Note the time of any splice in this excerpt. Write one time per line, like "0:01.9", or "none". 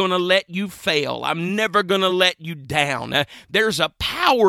none